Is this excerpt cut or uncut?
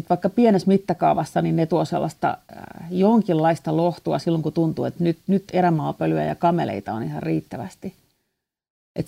cut